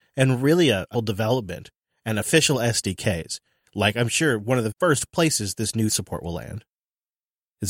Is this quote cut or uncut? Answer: cut